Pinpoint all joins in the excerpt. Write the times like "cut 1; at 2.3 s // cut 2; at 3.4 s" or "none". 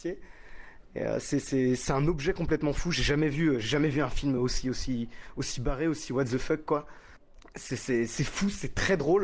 none